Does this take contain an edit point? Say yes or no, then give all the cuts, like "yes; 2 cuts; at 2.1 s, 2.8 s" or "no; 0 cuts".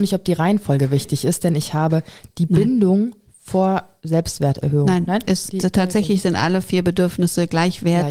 no; 0 cuts